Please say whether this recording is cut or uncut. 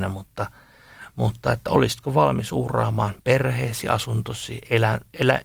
uncut